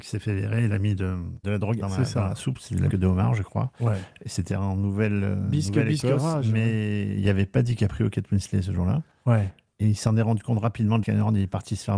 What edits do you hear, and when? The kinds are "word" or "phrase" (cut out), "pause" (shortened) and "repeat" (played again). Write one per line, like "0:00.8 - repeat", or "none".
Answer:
0:01.4 - word
0:01.8 - word
0:02.9 - word
0:11.0 - word